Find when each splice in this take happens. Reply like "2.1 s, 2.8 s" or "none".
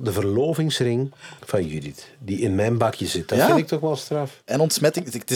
1.4 s